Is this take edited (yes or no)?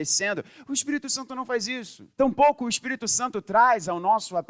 yes